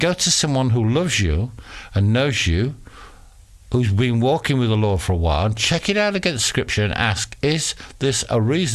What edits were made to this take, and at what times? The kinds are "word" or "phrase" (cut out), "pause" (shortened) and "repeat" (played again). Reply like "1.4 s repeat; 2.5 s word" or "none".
3.6 s pause